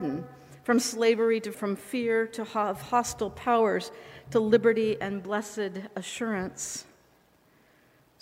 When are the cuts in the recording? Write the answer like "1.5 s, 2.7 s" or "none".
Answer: 1.5 s